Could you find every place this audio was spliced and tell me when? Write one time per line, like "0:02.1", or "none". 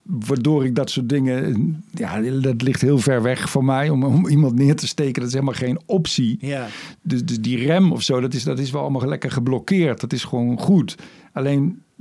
none